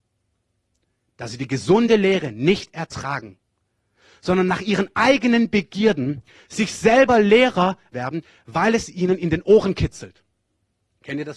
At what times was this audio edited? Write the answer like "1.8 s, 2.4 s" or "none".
7.9 s